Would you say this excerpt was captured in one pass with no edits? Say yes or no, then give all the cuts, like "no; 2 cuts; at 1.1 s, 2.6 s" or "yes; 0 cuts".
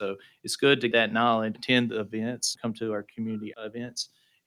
no; 4 cuts; at 0.9 s, 1.5 s, 2.5 s, 3.5 s